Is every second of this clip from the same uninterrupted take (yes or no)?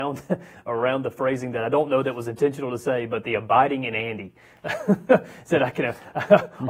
yes